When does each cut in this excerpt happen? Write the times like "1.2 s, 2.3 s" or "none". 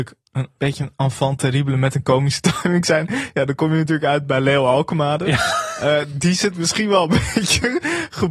none